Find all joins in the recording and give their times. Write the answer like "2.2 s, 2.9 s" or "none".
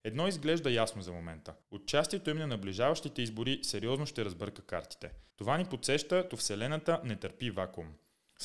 1.6 s, 5.3 s, 6.3 s